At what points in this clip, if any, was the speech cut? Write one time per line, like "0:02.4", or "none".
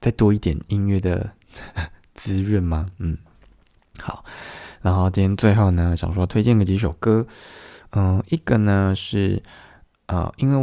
none